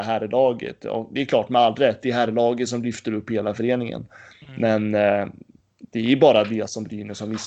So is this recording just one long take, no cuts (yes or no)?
yes